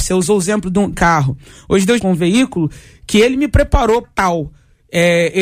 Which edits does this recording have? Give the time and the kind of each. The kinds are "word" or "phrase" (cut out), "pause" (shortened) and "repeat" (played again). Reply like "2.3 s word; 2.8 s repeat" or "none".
0.9 s word; 2.0 s phrase; 4.0 s word